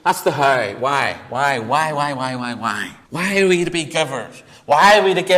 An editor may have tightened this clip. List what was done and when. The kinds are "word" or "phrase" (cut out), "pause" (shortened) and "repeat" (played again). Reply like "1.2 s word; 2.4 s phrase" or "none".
3.0 s pause